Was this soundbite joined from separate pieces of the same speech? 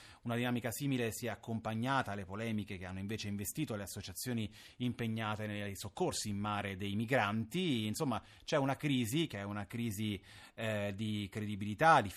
no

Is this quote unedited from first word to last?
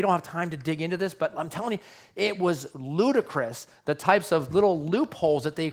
yes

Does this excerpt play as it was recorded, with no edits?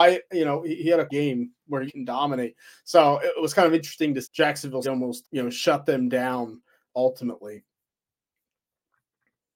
no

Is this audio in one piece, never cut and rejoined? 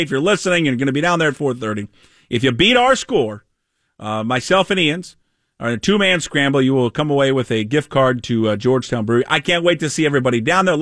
yes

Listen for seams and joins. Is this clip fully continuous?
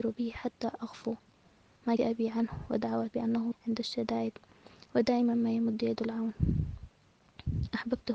no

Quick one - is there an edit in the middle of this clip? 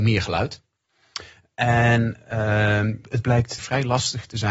yes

